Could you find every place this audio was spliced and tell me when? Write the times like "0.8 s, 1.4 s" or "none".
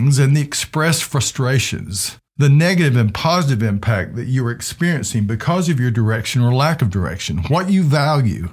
2.3 s